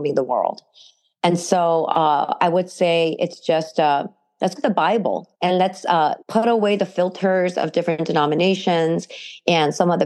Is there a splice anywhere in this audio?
yes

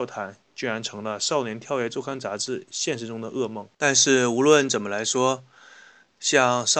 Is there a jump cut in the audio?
yes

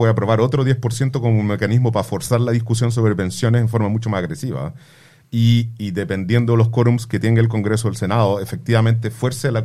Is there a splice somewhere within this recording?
no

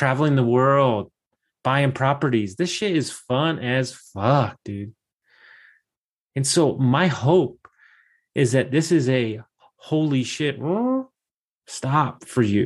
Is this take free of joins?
yes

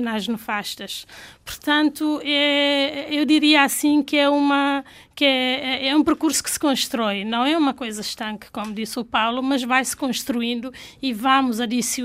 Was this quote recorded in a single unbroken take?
yes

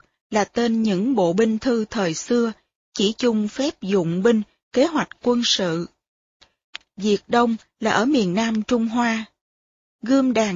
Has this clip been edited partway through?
no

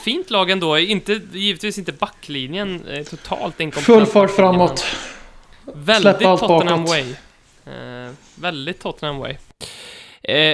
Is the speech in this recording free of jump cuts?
yes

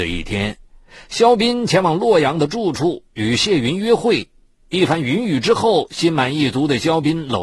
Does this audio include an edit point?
no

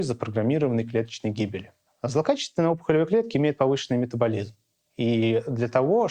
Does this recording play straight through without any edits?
yes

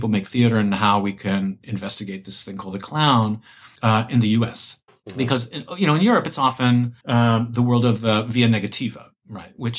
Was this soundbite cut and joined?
yes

